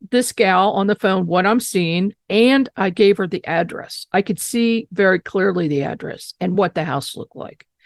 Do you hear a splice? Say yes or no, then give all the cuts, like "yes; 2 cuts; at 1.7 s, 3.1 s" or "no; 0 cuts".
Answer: no; 0 cuts